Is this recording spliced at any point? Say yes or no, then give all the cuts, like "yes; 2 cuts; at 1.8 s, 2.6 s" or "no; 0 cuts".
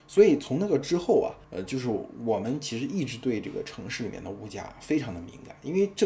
yes; 1 cut; at 1.4 s